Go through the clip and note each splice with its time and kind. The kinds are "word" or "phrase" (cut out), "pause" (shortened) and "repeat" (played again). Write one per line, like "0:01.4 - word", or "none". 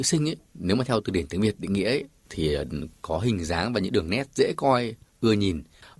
none